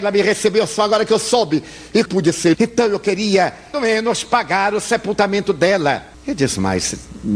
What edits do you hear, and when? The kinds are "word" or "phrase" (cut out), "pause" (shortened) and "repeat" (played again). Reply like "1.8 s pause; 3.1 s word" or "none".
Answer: 2.0 s phrase; 2.5 s word; 3.7 s word; 6.1 s pause

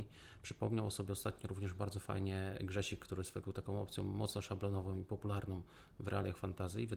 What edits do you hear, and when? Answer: 3.4 s word

